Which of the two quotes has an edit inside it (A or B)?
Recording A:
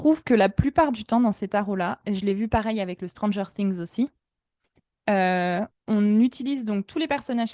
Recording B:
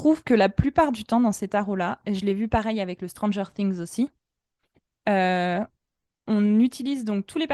A